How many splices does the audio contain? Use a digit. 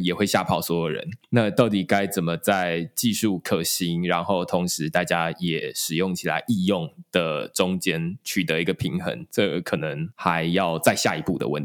1